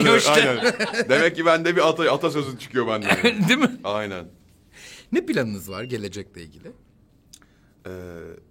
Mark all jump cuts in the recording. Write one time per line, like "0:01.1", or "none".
none